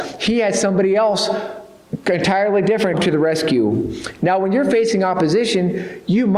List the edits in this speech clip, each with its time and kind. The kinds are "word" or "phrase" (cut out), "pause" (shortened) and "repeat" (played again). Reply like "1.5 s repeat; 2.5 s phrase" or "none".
2.9 s word